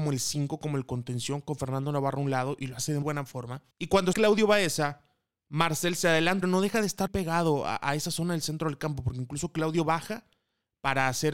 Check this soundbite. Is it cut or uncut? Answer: cut